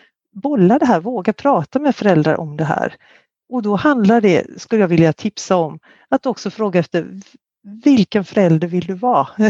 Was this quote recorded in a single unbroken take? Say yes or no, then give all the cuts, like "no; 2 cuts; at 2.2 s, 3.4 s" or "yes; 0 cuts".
yes; 0 cuts